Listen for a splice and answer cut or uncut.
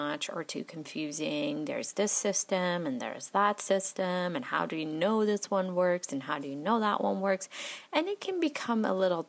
uncut